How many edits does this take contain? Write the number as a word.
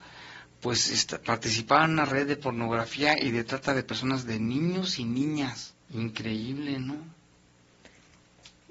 one